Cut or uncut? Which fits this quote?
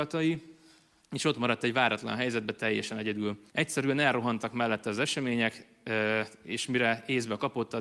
cut